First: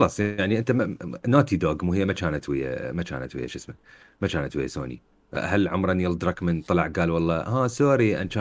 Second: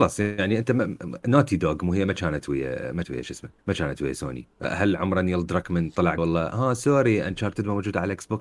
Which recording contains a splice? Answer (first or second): second